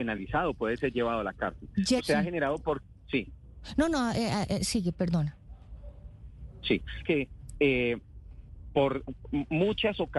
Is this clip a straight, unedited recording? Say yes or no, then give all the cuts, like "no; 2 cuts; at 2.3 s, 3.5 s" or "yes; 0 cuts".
no; 2 cuts; at 2.0 s, 7.0 s